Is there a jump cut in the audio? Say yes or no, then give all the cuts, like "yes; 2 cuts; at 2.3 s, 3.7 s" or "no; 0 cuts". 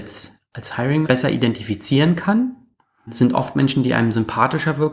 yes; 1 cut; at 1.0 s